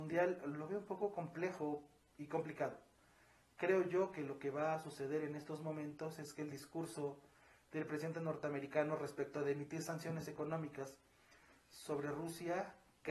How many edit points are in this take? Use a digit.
0